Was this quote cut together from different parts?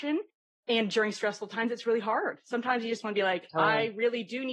no; 0 cuts

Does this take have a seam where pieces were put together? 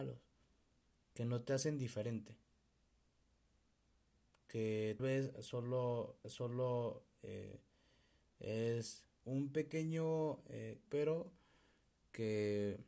yes; 4 cuts; at 5.0 s, 6.2 s, 9.1 s, 10.9 s

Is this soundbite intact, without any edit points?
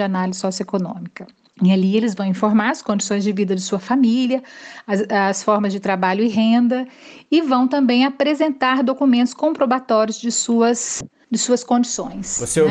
yes; 0 cuts

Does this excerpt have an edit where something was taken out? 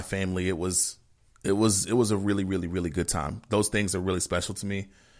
no; 0 cuts

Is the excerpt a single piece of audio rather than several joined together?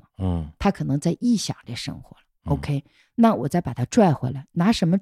yes; 0 cuts

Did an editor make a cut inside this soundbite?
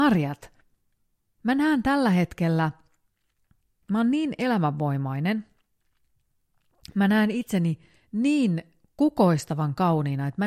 no; 0 cuts

